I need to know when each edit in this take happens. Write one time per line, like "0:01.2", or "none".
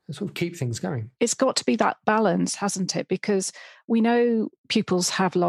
0:04.6